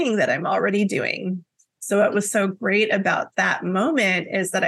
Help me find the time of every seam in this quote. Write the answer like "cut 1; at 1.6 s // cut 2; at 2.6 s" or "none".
none